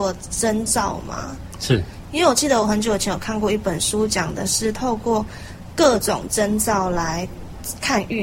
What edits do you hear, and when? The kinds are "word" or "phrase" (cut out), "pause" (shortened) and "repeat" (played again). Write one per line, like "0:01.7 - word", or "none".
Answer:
none

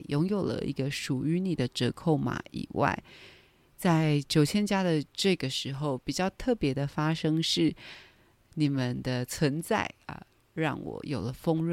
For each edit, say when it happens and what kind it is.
0:10.0 - pause

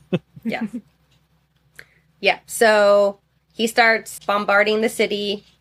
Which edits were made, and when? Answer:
0:04.2 - word

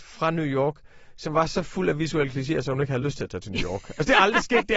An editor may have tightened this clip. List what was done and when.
none

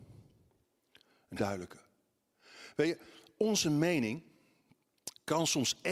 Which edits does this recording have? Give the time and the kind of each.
0:01.4 - word

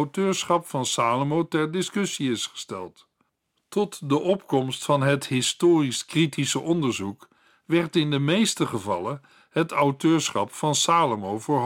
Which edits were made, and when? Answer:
none

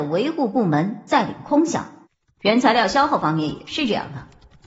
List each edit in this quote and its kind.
0:02.0 - pause

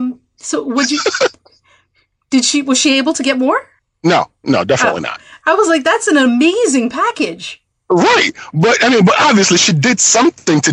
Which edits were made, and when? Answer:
none

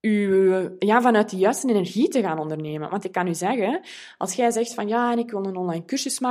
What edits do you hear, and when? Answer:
none

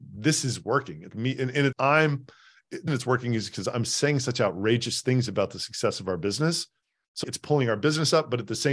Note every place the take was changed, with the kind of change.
0:01.1 - word
0:01.7 - word
0:02.9 - word
0:07.2 - word

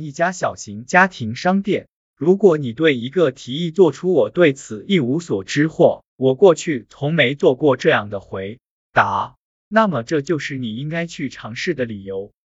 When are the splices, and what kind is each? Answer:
0:06.1 - pause

